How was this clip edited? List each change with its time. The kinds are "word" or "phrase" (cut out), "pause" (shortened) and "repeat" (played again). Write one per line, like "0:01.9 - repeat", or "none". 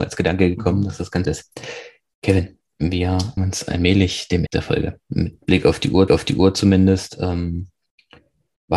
0:01.2 - word
0:03.4 - word
0:04.5 - word
0:05.0 - pause
0:06.1 - repeat